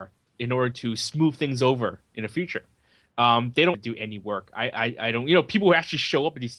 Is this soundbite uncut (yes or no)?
no